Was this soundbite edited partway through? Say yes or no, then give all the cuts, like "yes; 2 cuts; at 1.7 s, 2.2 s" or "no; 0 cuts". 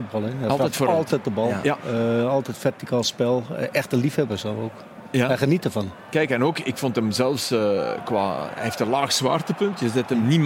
no; 0 cuts